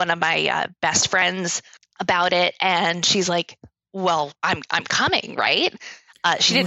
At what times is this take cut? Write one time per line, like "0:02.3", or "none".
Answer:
0:01.8
0:04.4